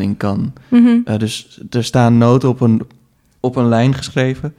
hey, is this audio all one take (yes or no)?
yes